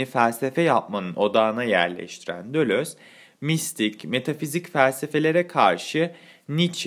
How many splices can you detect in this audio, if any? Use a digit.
0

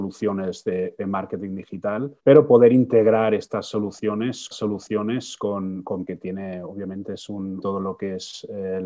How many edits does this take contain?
4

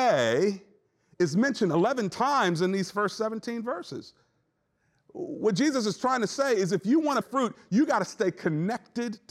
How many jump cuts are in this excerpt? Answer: 1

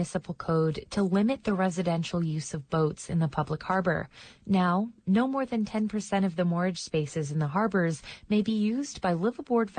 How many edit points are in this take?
0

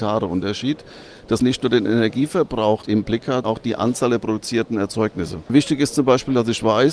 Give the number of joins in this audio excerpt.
3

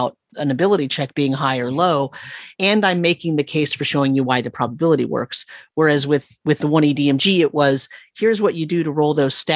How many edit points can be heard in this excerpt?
1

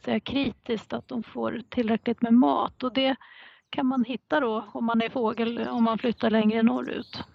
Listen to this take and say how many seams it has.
0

